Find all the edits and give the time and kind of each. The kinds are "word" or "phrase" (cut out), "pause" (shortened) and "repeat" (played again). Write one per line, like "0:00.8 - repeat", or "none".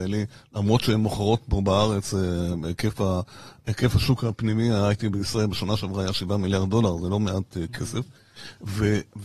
none